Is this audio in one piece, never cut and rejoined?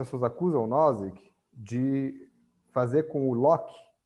yes; 0 cuts

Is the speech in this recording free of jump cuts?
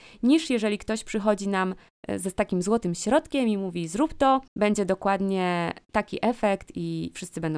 no; 1 cut; at 4.5 s

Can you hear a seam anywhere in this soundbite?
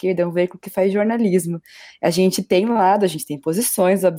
no; 0 cuts

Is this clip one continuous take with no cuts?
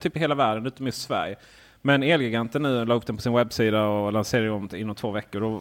yes; 0 cuts

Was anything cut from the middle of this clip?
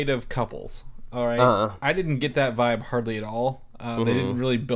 no; 0 cuts

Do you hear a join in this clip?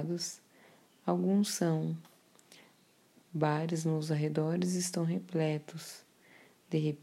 no; 0 cuts

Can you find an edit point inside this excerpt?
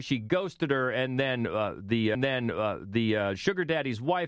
yes; 1 cut; at 2.1 s

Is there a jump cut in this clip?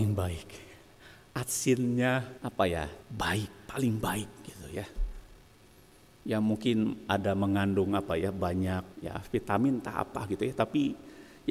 yes; 3 cuts; at 2.4 s, 3.0 s, 8.9 s

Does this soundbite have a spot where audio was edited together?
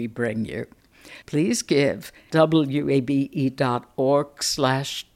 yes; 2 cuts; at 1.2 s, 2.3 s

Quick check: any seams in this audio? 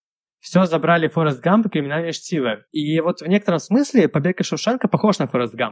yes; 1 cut; at 2.7 s

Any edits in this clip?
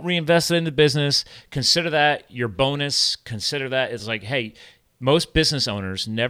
no; 0 cuts

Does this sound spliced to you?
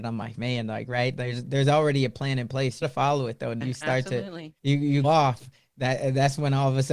yes; 4 cuts; at 2.8 s, 3.6 s, 4.6 s, 5.0 s

